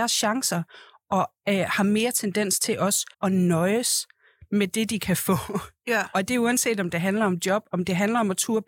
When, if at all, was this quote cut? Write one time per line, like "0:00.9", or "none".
0:03.1